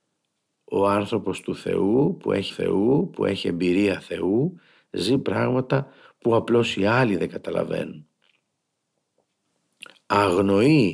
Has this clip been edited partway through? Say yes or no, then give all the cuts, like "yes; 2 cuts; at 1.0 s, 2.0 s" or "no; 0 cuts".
yes; 1 cut; at 2.5 s